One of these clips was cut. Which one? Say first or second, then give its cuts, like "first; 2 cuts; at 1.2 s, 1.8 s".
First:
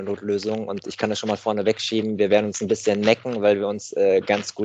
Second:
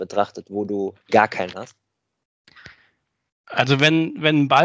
second; 2 cuts; at 1.0 s, 1.5 s